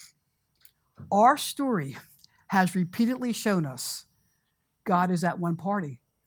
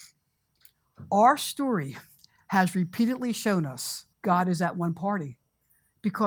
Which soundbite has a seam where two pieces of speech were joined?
second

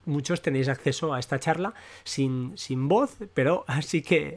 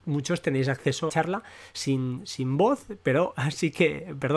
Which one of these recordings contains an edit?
second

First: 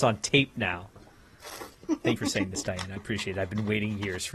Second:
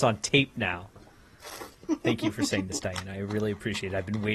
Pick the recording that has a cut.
first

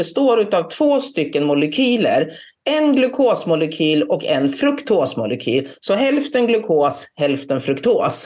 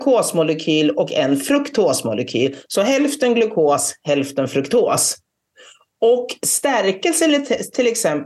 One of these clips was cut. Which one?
second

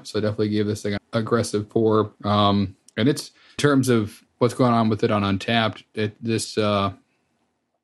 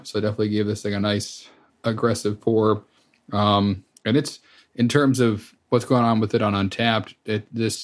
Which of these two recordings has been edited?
first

